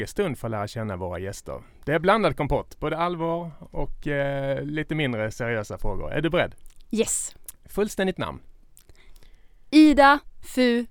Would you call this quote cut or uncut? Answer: uncut